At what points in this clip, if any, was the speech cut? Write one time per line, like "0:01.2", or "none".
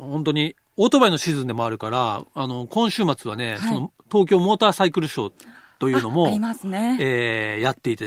none